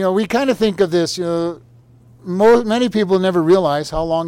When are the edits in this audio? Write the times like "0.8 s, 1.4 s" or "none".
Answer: none